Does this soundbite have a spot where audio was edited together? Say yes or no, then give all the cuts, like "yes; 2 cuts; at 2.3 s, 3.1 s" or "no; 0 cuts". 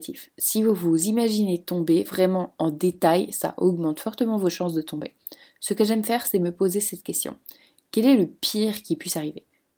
no; 0 cuts